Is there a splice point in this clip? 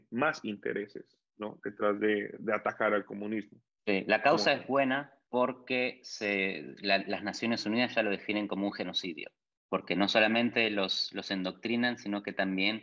no; 0 cuts

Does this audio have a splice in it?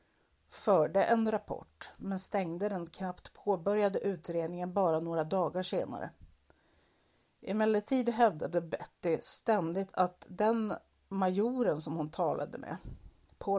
no; 0 cuts

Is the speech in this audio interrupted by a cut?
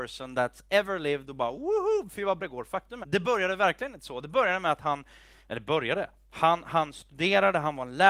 yes; 2 cuts; at 2.4 s, 3.0 s

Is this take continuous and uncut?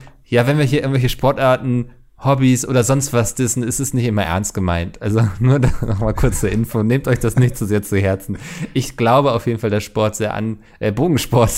yes; 0 cuts

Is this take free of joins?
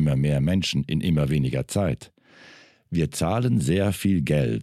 yes; 0 cuts

